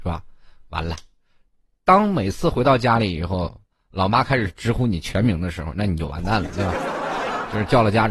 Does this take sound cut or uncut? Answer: uncut